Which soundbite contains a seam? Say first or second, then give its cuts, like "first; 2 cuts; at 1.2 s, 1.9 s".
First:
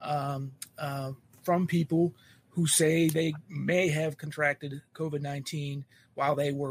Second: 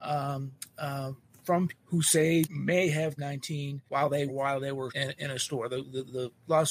second; 6 cuts; at 1.7 s, 2.4 s, 3.2 s, 3.9 s, 4.3 s, 4.9 s